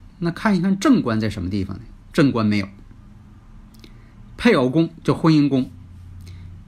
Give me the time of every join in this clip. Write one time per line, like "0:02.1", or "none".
0:02.0